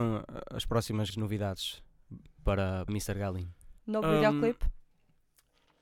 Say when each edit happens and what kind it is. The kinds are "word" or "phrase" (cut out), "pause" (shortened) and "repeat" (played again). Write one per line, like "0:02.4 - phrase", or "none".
0:01.1 - word
0:02.9 - word
0:03.8 - pause